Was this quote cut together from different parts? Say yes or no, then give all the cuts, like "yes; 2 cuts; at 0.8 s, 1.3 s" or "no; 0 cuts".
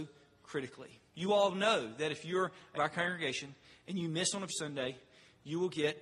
yes; 3 cuts; at 1.1 s, 2.7 s, 4.5 s